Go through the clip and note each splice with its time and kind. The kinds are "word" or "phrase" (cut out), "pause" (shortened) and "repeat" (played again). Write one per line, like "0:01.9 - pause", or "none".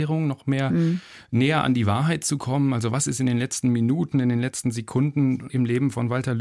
0:05.5 - word